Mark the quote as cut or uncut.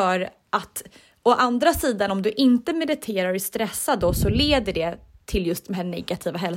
uncut